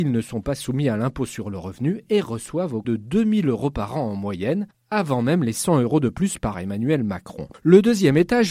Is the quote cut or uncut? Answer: cut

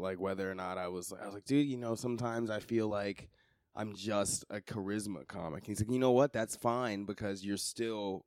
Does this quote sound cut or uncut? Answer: uncut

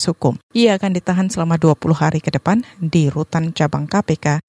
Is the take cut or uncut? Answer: uncut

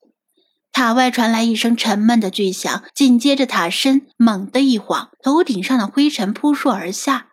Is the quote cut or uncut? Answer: cut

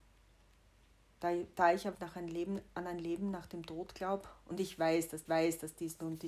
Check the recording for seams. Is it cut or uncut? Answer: cut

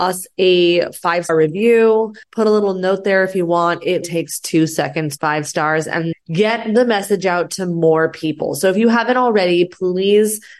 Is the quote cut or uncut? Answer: cut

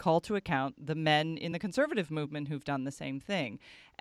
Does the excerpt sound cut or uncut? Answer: uncut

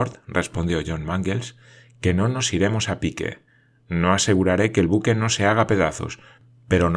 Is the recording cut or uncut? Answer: uncut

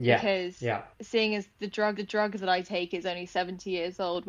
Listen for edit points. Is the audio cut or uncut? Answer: cut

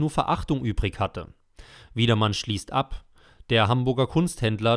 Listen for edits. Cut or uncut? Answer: uncut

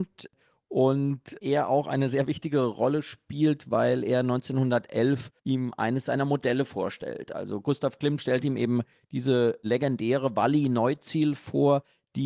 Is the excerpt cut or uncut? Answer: cut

